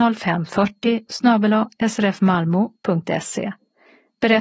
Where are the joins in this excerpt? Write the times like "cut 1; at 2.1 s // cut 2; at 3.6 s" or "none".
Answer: cut 1; at 1.1 s

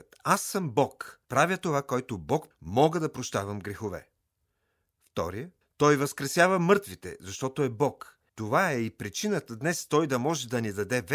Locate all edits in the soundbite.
cut 1; at 1.2 s // cut 2; at 2.5 s // cut 3; at 5.6 s // cut 4; at 8.3 s

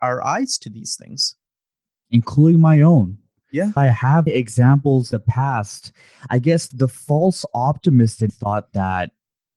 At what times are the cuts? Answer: cut 1; at 1.8 s // cut 2; at 3.8 s // cut 3; at 4.3 s // cut 4; at 5.1 s // cut 5; at 6.7 s // cut 6; at 8.3 s

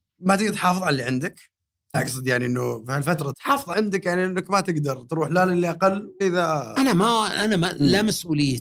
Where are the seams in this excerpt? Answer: cut 1; at 1.9 s // cut 2; at 3.3 s // cut 3; at 3.7 s // cut 4; at 6.2 s

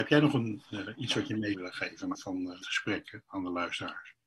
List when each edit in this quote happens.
cut 1; at 1.5 s // cut 2; at 2.1 s // cut 3; at 2.6 s

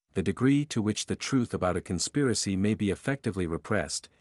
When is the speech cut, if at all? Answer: none

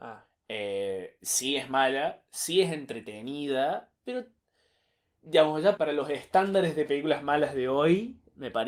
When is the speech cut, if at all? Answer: cut 1; at 4.0 s // cut 2; at 5.8 s

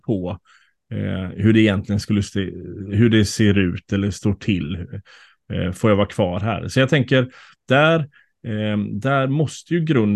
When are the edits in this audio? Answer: none

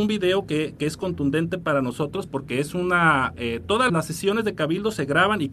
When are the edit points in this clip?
cut 1; at 3.9 s

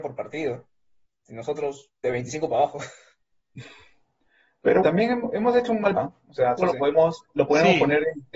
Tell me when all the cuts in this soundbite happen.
cut 1; at 2.0 s // cut 2; at 4.8 s // cut 3; at 6.0 s // cut 4; at 6.6 s

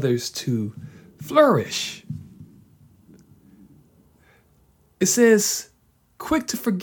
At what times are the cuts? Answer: none

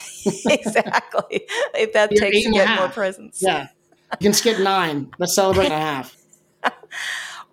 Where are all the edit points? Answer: cut 1; at 1.7 s // cut 2; at 2.1 s // cut 3; at 4.2 s // cut 4; at 5.7 s

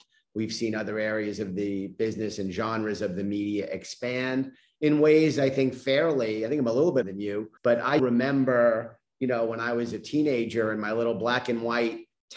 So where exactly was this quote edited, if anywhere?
cut 1; at 7.0 s // cut 2; at 7.6 s // cut 3; at 8.0 s

